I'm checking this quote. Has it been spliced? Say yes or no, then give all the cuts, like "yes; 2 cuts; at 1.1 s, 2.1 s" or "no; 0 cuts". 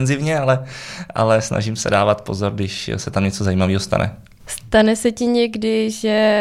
no; 0 cuts